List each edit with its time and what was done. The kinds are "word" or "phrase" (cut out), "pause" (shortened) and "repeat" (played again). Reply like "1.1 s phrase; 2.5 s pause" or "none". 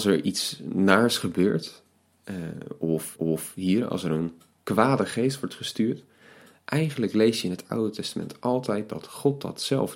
3.2 s repeat